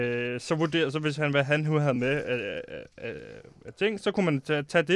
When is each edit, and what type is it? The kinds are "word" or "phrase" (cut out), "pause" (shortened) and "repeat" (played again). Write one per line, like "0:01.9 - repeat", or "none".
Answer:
none